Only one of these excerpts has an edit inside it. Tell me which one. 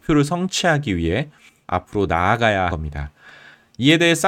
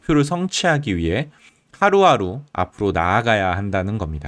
first; 2 cuts; at 1.6 s, 2.7 s

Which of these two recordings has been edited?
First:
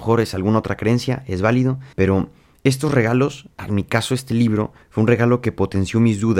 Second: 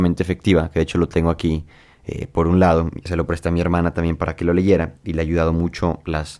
first; 3 cuts; at 1.9 s, 3.5 s, 4.8 s

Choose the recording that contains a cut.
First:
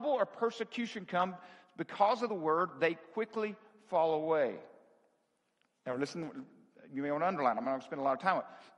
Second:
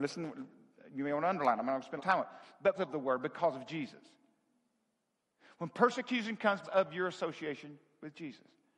second; 3 cuts; at 2.0 s, 2.8 s, 6.6 s

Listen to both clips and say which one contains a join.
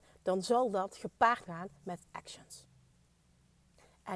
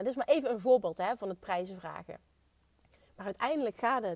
first; 2 cuts; at 1.5 s, 2.0 s

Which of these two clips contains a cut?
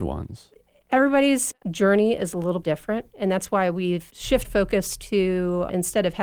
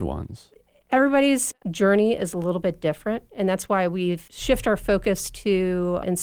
first; 2 cuts; at 2.6 s, 4.4 s

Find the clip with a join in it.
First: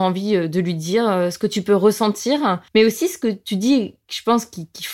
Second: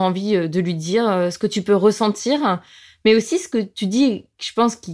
first; 1 cut; at 2.7 s

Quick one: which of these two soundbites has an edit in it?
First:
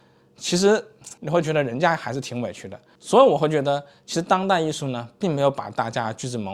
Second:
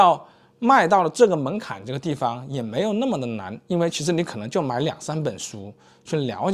first; 1 cut; at 1.2 s

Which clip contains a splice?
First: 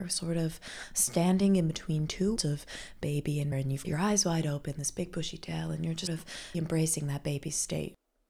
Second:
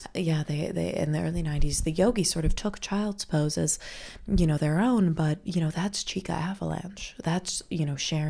first; 5 cuts; at 2.4 s, 3.5 s, 3.8 s, 6.1 s, 6.5 s

